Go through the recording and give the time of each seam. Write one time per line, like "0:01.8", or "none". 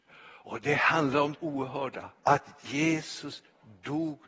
0:01.3
0:02.2

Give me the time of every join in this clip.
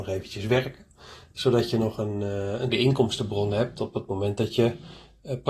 0:02.7

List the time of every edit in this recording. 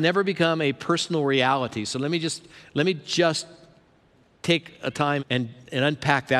0:05.2

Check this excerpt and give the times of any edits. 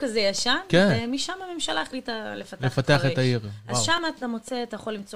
none

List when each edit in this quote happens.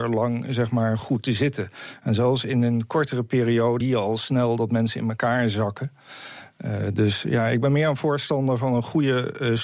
0:01.0
0:03.8

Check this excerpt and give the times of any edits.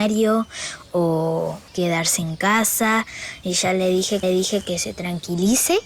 0:01.7
0:04.2

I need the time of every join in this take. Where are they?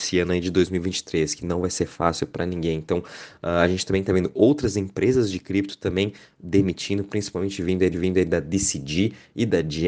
0:07.9

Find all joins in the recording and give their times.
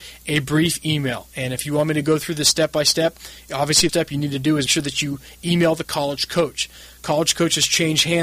0:03.9
0:04.7
0:05.8

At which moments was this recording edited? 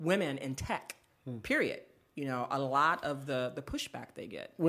none

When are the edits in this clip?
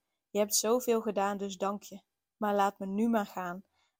none

